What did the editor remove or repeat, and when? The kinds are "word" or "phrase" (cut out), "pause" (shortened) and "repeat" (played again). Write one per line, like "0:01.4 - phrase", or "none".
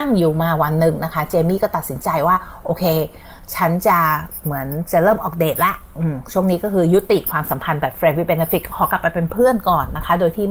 none

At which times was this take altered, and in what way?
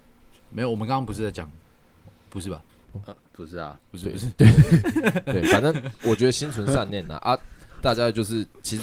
0:02.7 - pause

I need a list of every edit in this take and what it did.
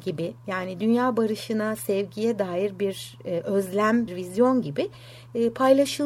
0:04.1 - word

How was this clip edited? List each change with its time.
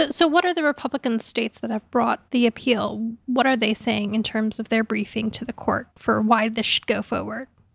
0:02.3 - pause
0:05.9 - pause

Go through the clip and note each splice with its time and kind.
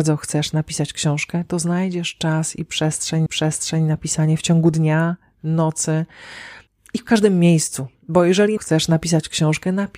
0:03.3 - repeat
0:06.7 - pause
0:08.6 - phrase

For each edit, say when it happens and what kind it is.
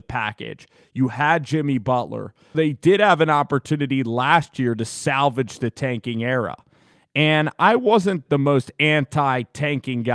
0:02.5 - word
0:08.3 - word

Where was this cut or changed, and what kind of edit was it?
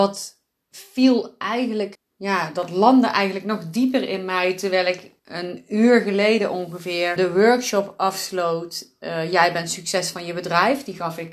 0:01.9 - word
0:05.2 - phrase
0:07.2 - word

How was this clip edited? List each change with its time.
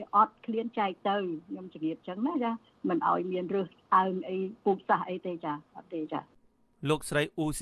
none

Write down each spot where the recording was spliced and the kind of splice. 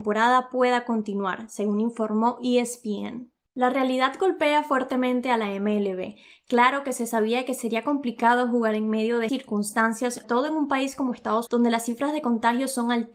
0:09.3 - word
0:10.2 - word
0:11.5 - word

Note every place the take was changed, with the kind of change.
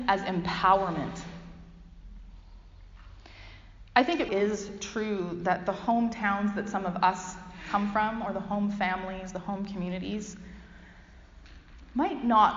0:04.3 - word

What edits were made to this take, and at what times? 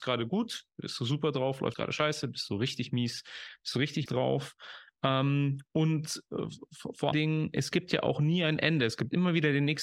0:01.7 - word
0:04.1 - word
0:07.1 - word

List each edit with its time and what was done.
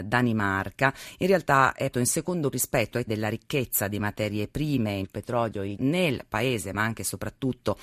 0:01.9 - word
0:02.5 - word
0:03.1 - word
0:05.0 - word
0:05.8 - word

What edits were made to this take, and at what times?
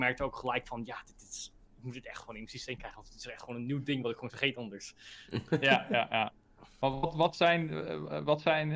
0:04.3 - word

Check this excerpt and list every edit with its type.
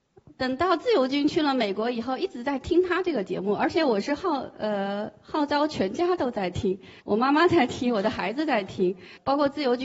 0:07.0 - pause

